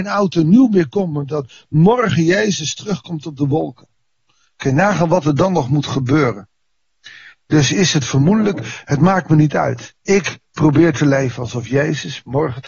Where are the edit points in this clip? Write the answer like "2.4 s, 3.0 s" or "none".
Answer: 10.0 s